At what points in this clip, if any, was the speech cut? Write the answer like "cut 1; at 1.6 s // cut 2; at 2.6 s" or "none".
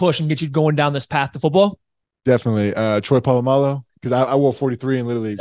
cut 1; at 3.9 s